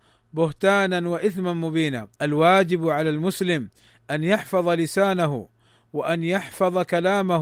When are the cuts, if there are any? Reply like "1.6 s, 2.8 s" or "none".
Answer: 2.1 s

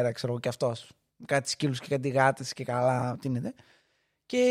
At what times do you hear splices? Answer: none

